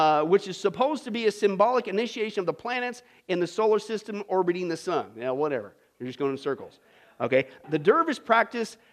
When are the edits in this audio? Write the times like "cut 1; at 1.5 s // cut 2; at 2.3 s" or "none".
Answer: cut 1; at 7.6 s